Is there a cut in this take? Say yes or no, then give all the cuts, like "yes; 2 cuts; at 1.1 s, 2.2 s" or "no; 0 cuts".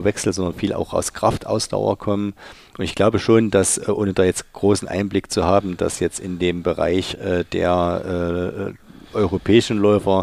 no; 0 cuts